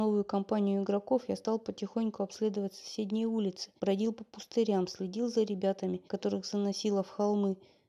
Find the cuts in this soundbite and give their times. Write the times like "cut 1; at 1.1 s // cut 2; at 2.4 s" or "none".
cut 1; at 3.8 s // cut 2; at 6.1 s